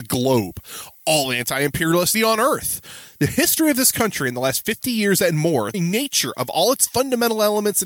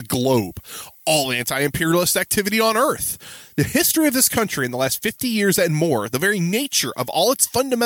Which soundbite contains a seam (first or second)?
first